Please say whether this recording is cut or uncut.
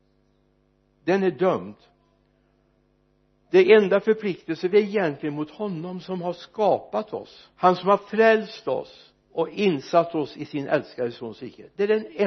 cut